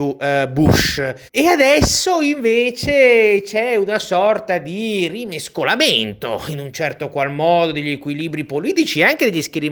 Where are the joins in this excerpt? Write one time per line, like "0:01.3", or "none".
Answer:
0:01.3